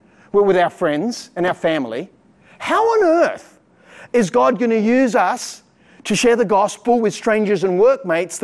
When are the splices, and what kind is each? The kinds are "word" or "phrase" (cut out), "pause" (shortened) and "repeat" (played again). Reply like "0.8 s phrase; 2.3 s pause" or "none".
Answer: none